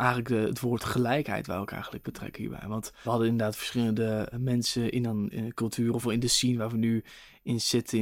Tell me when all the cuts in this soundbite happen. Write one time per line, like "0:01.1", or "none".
0:02.0
0:03.0
0:04.3
0:06.0

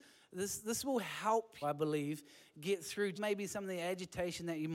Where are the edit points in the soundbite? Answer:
0:01.6
0:03.2

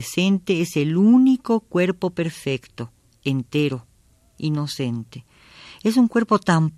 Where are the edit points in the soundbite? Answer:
none

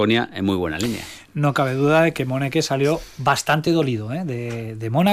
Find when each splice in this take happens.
none

